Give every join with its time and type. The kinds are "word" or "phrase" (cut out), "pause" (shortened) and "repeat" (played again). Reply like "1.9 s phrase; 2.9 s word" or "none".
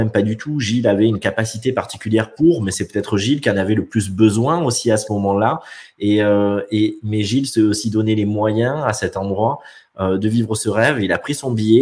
none